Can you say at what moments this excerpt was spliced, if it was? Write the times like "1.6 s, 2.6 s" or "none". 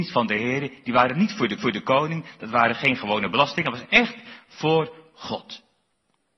1.6 s